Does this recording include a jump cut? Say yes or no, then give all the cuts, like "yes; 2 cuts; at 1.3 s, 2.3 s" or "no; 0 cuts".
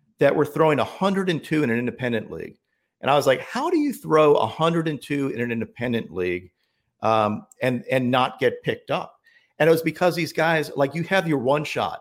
no; 0 cuts